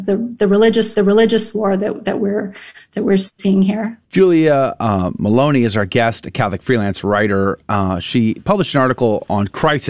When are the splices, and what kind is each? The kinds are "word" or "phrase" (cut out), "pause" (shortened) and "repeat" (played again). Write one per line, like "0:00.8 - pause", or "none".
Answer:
0:01.0 - repeat
0:04.0 - pause